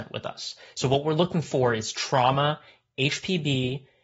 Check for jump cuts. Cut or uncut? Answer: uncut